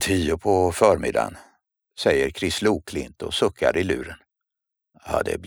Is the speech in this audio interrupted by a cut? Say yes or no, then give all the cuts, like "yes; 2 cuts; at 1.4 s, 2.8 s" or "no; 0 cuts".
no; 0 cuts